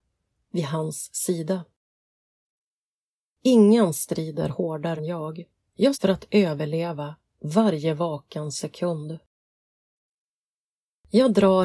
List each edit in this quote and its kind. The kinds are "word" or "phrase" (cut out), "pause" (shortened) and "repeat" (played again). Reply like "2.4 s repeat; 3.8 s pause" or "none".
5.0 s word; 5.9 s word